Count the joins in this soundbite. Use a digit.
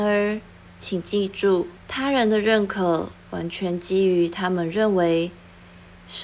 1